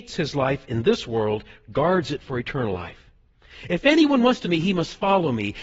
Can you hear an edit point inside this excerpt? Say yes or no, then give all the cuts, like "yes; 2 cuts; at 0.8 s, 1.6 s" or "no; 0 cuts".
yes; 1 cut; at 4.4 s